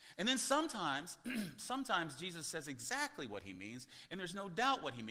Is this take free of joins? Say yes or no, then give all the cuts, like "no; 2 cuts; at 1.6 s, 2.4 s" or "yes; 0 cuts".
yes; 0 cuts